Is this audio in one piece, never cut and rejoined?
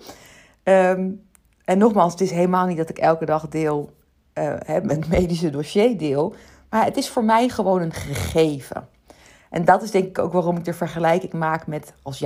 yes; 0 cuts

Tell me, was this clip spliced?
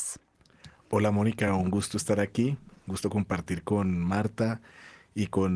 no; 0 cuts

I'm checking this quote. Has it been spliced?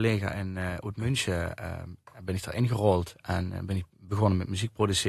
no; 0 cuts

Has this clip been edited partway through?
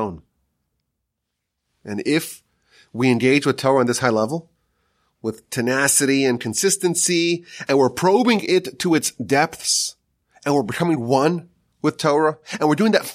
no; 0 cuts

